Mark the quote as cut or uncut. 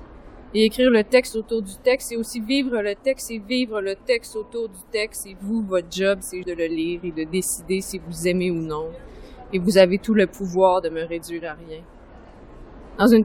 cut